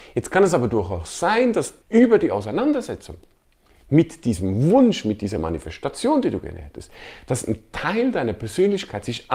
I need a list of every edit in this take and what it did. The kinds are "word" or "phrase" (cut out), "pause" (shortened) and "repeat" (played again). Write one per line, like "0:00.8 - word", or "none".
0:01.8 - pause